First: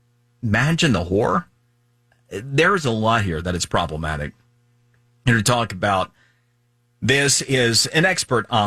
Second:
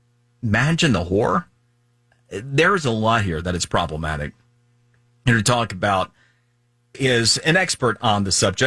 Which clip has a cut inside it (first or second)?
second